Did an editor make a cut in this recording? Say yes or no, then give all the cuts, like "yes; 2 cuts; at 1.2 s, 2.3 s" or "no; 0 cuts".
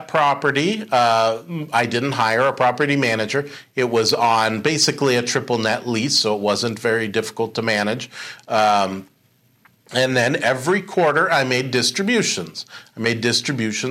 no; 0 cuts